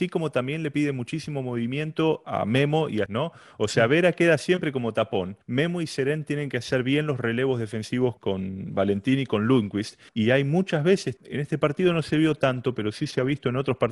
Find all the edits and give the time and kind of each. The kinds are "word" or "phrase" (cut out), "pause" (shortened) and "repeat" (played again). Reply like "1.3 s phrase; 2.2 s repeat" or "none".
2.2 s word; 3.1 s word; 5.4 s pause; 8.2 s word; 10.1 s pause; 11.2 s word